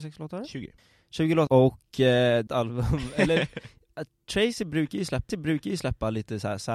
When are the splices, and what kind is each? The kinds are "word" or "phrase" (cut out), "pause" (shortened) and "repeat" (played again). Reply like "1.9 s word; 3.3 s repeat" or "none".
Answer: 1.5 s word; 2.5 s phrase; 5.3 s repeat